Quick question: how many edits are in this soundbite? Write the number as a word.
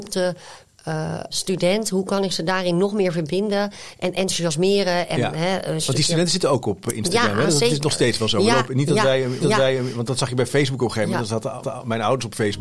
three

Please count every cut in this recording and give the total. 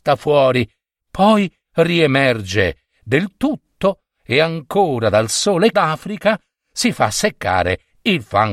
two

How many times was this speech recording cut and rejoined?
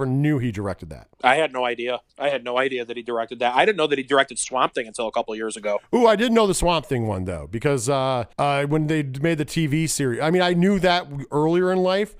three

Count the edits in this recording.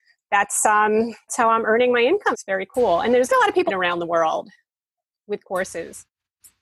four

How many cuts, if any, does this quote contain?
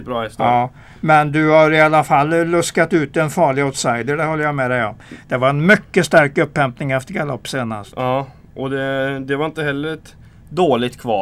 zero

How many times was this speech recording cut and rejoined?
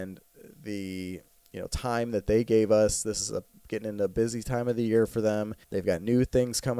one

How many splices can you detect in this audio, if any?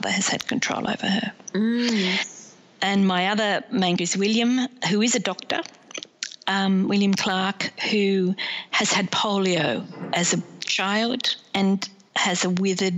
one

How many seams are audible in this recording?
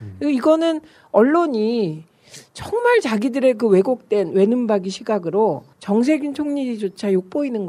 one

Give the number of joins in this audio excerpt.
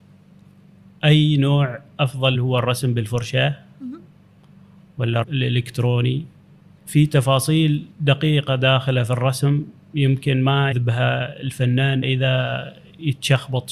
six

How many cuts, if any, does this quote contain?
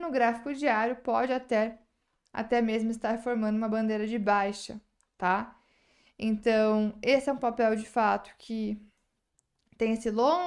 zero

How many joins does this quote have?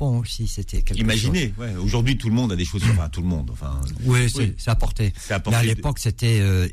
zero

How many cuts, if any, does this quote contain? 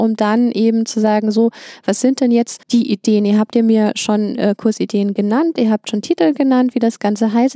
one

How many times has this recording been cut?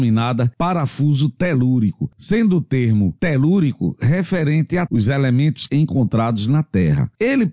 two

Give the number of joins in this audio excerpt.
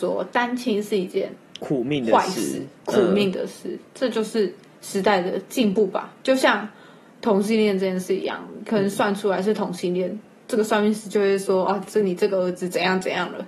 zero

